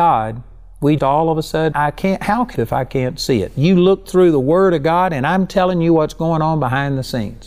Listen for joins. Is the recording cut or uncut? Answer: cut